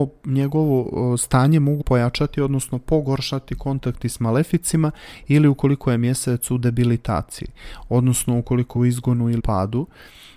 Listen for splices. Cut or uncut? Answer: cut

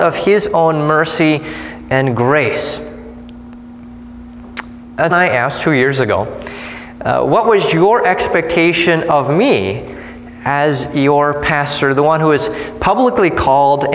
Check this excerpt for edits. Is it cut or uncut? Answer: cut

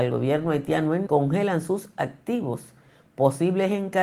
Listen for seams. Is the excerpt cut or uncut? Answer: cut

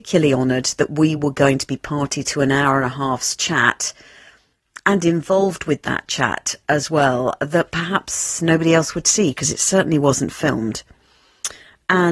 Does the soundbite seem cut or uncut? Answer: uncut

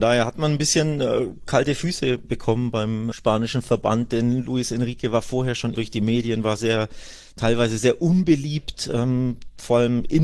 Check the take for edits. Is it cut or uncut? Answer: cut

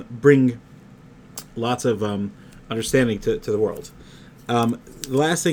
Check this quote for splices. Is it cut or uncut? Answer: uncut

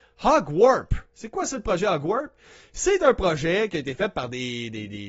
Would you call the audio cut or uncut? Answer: uncut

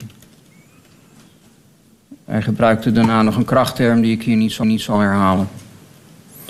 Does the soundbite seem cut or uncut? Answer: cut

